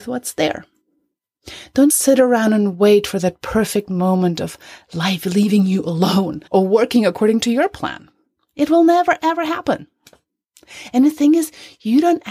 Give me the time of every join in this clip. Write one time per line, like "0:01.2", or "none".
0:01.9
0:06.5